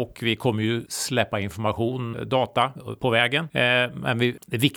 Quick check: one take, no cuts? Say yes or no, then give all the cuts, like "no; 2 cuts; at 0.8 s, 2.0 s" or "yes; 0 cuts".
no; 1 cut; at 2.1 s